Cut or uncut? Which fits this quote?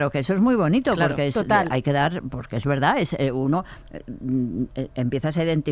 uncut